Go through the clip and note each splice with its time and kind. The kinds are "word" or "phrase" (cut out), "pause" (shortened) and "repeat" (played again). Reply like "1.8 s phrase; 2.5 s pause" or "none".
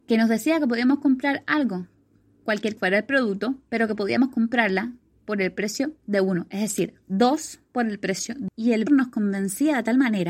2.8 s word; 8.5 s word; 8.9 s word